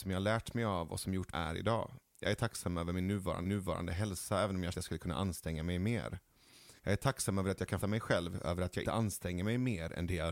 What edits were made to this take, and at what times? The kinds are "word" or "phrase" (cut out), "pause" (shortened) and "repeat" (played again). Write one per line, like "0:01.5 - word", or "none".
0:01.3 - phrase
0:03.5 - repeat
0:04.7 - phrase
0:06.8 - pause
0:07.8 - word
0:08.8 - word